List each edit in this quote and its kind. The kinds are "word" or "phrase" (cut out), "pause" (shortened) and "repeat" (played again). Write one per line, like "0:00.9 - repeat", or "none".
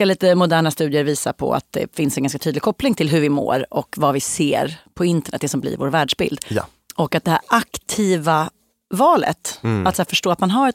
none